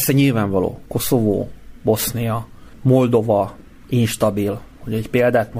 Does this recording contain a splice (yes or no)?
no